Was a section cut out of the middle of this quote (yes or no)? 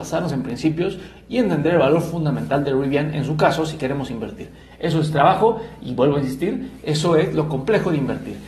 no